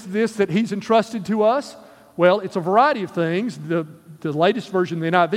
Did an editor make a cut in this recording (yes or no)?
no